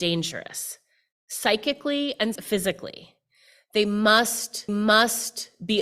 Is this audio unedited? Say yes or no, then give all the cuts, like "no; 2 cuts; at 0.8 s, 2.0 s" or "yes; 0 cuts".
no; 2 cuts; at 2.4 s, 4.7 s